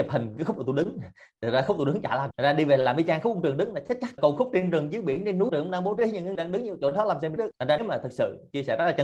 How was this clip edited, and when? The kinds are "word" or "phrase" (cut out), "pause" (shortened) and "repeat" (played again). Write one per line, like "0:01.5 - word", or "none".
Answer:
0:02.3 - word
0:04.2 - word
0:05.5 - word
0:06.3 - word
0:07.4 - word
0:07.8 - word